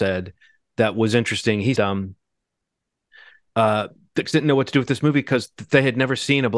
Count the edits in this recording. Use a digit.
2